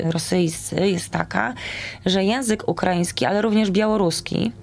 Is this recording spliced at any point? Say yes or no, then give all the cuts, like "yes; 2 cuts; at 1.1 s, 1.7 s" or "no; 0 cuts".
no; 0 cuts